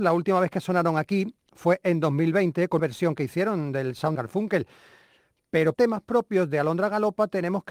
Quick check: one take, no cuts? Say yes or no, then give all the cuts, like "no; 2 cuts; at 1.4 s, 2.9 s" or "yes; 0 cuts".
no; 3 cuts; at 2.8 s, 4.2 s, 5.7 s